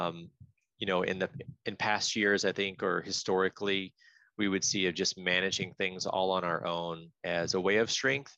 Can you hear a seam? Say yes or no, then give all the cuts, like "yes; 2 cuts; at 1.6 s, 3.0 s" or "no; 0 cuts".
no; 0 cuts